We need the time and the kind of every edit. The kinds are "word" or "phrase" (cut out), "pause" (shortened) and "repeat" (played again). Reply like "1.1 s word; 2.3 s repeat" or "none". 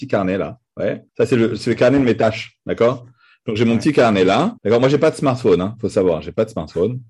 1.1 s pause; 4.6 s pause